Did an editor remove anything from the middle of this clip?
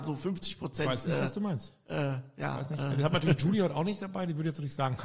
no; 0 cuts

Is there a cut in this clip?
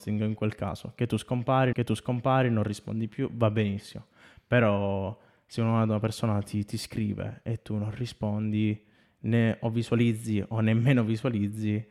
yes; 1 cut; at 1.7 s

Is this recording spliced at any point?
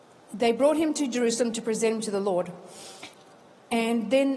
no; 0 cuts

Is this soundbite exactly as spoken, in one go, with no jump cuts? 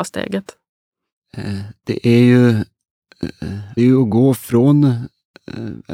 no; 1 cut; at 3.8 s

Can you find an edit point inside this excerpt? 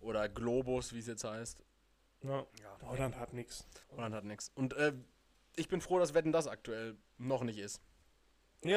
yes; 3 cuts; at 2.5 s, 3.8 s, 7.0 s

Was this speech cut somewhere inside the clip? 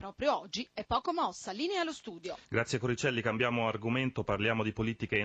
yes; 1 cut; at 2.4 s

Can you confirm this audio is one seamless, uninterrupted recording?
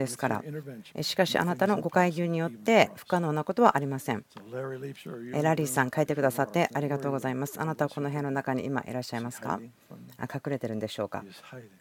no; 1 cut; at 0.9 s

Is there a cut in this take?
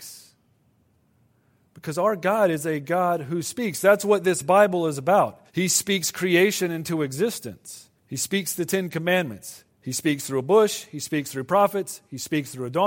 yes; 3 cuts; at 5.5 s, 8.0 s, 9.7 s

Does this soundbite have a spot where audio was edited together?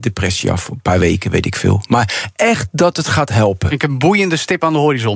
no; 0 cuts

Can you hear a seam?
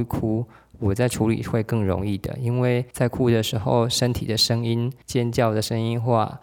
yes; 2 cuts; at 2.9 s, 5.0 s

